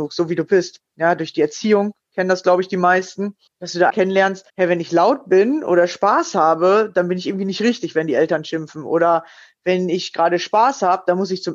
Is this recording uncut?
no; 3 cuts; at 3.5 s, 3.9 s, 4.5 s

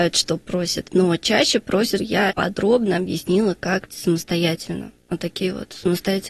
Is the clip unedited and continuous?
no; 4 cuts; at 0.9 s, 2.0 s, 2.3 s, 3.9 s

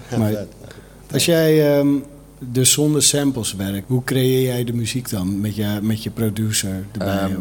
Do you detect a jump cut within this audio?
yes; 1 cut; at 3.8 s

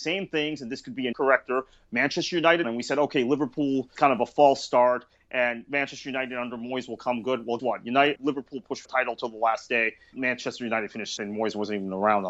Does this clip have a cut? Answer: yes; 8 cuts; at 1.1 s, 2.6 s, 4.0 s, 7.6 s, 8.2 s, 8.8 s, 10.1 s, 11.2 s

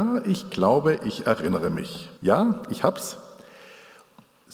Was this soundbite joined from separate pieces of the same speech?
yes; 1 cut; at 2.2 s

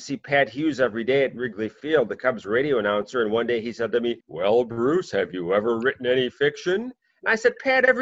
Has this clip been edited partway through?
yes; 1 cut; at 4.2 s

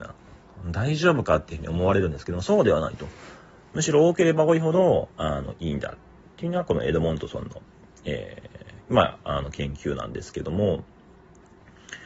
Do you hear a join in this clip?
no; 0 cuts

